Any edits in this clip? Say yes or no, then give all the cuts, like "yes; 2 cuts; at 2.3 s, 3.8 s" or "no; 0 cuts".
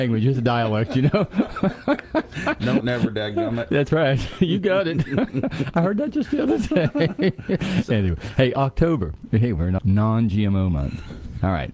yes; 2 cuts; at 2.8 s, 9.8 s